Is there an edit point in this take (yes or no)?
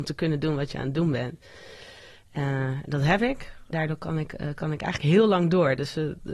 yes